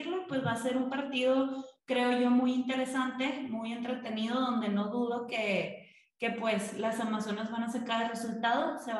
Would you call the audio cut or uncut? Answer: uncut